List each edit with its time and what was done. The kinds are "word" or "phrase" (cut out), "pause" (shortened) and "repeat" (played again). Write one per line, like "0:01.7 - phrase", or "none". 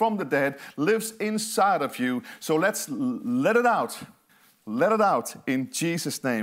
0:04.3 - pause